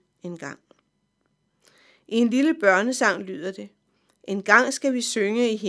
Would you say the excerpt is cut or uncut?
uncut